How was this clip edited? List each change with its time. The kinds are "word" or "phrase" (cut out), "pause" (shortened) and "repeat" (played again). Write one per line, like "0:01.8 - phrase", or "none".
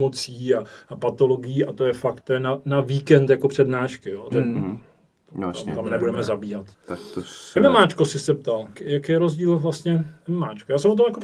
0:02.2 - word
0:04.3 - word
0:06.7 - pause
0:08.7 - word